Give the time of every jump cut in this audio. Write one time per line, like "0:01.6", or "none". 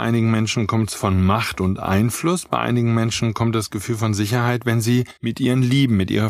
0:05.2